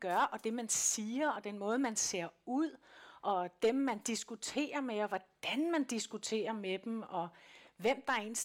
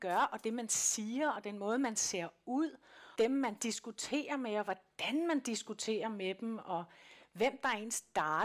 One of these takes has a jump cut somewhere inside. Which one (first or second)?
second